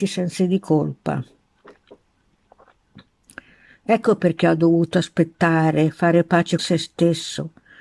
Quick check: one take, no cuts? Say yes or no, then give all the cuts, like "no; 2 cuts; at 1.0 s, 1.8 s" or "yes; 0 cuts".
no; 1 cut; at 6.6 s